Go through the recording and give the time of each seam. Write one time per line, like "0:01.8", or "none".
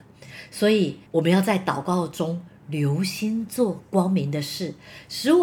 0:01.1